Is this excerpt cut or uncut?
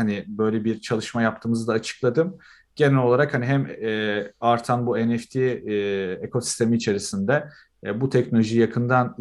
uncut